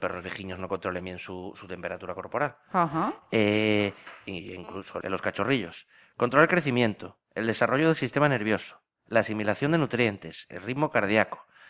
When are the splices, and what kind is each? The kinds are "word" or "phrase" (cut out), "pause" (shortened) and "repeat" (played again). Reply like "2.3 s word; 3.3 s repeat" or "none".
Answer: 5.0 s word

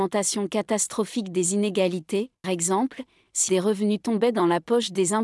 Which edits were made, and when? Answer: 2.4 s word; 3.5 s word

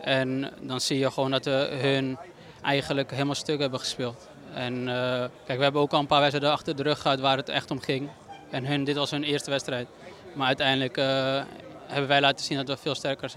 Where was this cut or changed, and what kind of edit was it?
5.4 s pause

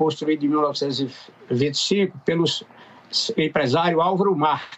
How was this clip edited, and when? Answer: none

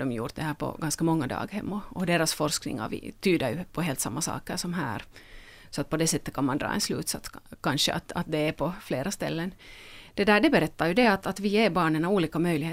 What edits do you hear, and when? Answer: none

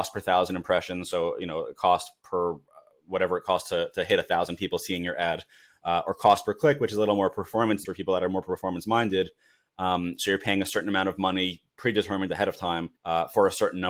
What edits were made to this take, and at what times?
7.8 s word; 11.7 s pause; 13.0 s pause

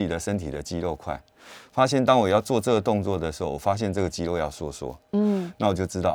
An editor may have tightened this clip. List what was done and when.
none

